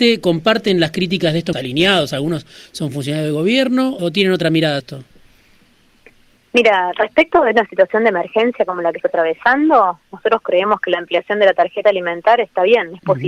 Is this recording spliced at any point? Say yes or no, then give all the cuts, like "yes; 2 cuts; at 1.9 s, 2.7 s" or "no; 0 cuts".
yes; 4 cuts; at 1.5 s, 4.0 s, 4.8 s, 9.0 s